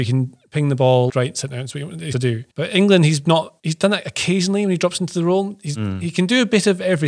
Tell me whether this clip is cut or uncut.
cut